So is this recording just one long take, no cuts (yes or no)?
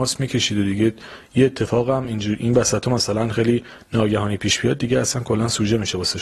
yes